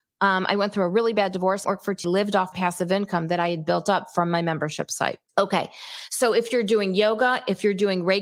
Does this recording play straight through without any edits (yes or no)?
no